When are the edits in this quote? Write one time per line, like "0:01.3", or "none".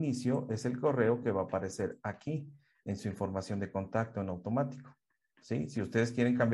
none

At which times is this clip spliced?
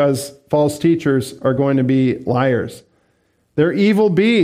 none

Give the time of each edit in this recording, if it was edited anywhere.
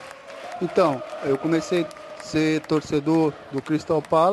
none

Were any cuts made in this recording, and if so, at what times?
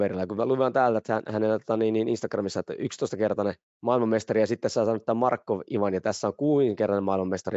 0:03.6

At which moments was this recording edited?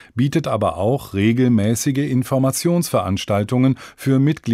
none

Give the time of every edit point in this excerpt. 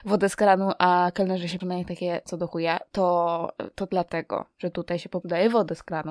0:01.6
0:05.2

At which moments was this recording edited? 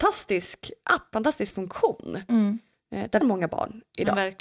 0:01.1
0:03.2

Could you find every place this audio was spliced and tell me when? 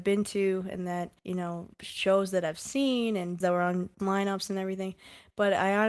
0:01.2
0:01.7
0:03.4
0:04.0

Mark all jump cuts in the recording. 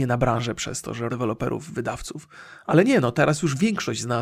0:01.1

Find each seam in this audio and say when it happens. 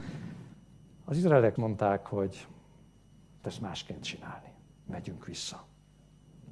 0:01.6
0:03.4
0:04.9

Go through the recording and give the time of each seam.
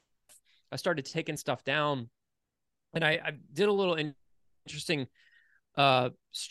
none

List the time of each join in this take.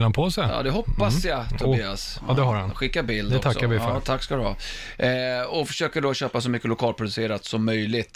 none

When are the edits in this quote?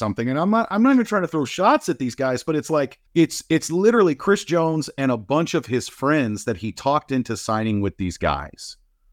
0:03.1

